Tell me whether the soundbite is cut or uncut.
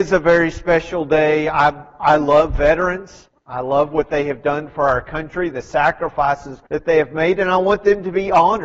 cut